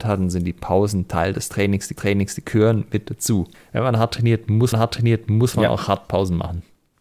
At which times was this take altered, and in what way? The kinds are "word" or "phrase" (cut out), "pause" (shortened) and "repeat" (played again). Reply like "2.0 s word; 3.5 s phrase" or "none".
2.0 s repeat; 3.5 s pause; 4.7 s repeat